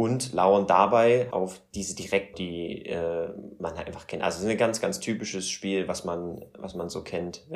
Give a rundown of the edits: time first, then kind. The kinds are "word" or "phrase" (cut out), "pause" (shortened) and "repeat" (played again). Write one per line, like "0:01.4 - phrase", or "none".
0:01.3 - word
0:02.3 - word